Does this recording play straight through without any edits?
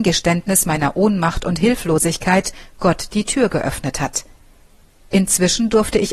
yes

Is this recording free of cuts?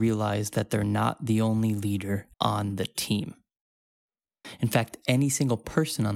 no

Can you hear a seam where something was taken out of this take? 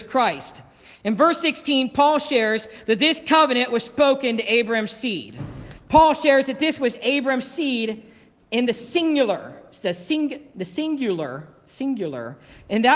no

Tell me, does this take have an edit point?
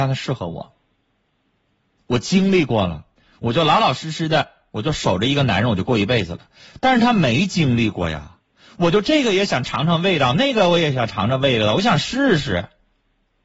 no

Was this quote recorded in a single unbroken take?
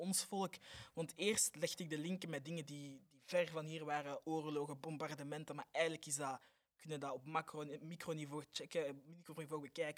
yes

